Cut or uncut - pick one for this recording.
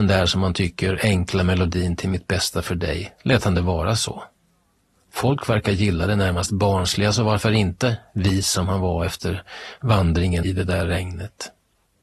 uncut